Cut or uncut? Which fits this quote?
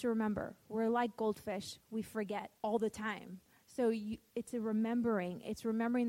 cut